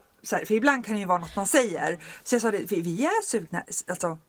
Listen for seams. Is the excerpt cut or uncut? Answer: uncut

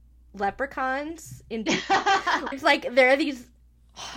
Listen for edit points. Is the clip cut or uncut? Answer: cut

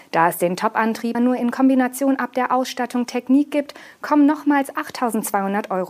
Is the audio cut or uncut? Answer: cut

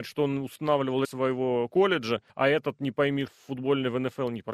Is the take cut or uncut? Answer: cut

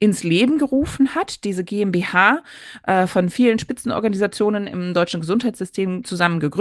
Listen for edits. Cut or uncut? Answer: uncut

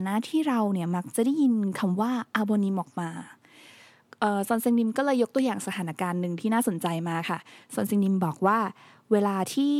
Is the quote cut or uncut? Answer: uncut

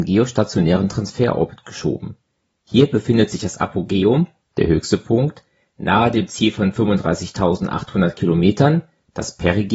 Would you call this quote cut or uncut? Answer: uncut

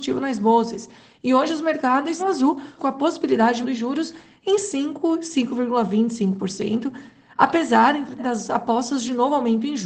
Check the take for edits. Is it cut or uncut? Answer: cut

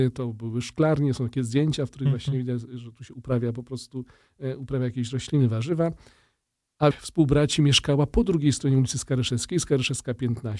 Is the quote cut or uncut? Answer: cut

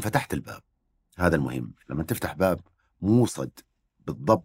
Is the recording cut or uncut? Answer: uncut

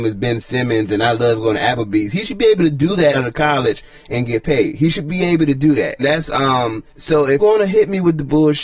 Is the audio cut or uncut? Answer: cut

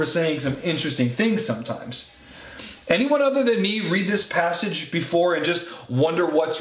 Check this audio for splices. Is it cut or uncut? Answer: uncut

